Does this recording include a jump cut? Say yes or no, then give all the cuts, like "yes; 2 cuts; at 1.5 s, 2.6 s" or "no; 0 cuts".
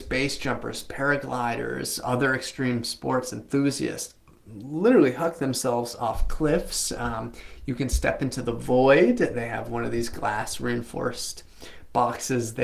no; 0 cuts